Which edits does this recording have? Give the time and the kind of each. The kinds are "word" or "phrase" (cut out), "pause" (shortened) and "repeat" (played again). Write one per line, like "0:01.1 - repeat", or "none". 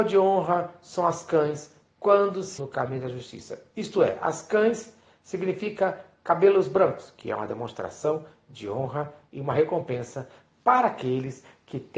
0:02.6 - word